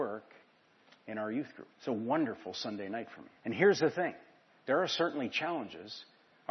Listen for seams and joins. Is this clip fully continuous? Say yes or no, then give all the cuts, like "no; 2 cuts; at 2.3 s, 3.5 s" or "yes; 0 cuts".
no; 2 cuts; at 1.7 s, 3.4 s